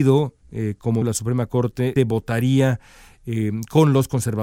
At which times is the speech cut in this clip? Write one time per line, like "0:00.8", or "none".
0:01.0
0:02.0